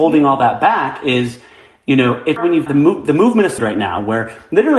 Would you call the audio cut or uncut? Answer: cut